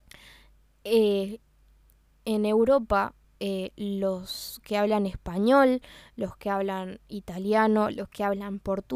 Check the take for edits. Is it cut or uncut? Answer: uncut